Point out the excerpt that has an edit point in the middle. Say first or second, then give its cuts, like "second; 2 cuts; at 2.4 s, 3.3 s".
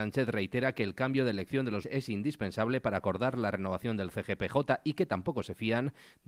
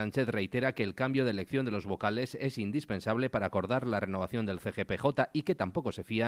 first; 1 cut; at 1.8 s